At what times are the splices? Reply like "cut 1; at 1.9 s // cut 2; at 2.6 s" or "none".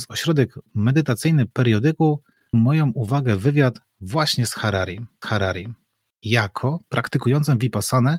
cut 1; at 2.5 s // cut 2; at 5.2 s